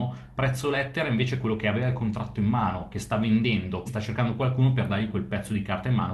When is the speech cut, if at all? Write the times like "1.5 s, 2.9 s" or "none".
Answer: 3.9 s

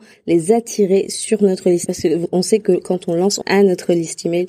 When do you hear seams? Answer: 1.9 s, 3.4 s

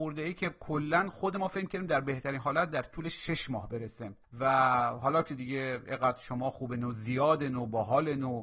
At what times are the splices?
none

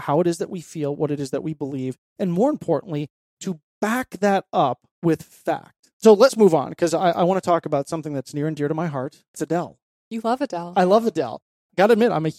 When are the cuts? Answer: 4.9 s, 5.9 s, 9.3 s

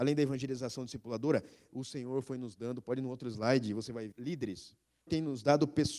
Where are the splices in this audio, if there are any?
4.1 s, 5.1 s

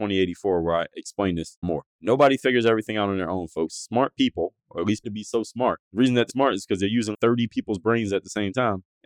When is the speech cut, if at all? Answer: 1.6 s, 5.0 s, 6.3 s, 7.1 s

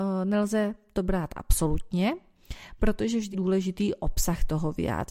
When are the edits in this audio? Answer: 3.3 s

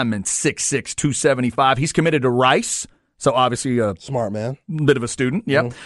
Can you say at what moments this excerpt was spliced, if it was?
none

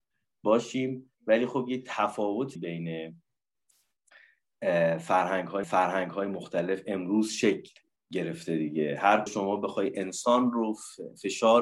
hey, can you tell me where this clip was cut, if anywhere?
1.1 s, 2.6 s, 5.6 s, 8.0 s, 9.3 s

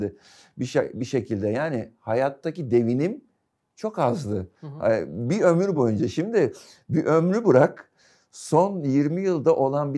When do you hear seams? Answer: none

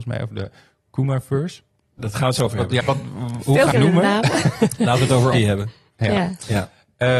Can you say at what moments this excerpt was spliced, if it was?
2.0 s, 2.5 s, 2.8 s, 3.7 s, 5.3 s

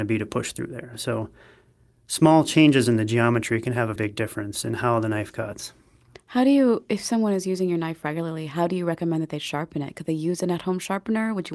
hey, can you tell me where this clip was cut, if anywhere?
4.0 s

